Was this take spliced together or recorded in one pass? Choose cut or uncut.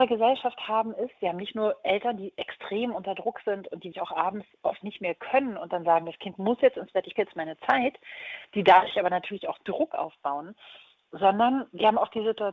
cut